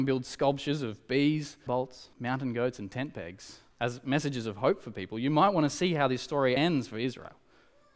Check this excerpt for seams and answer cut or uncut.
cut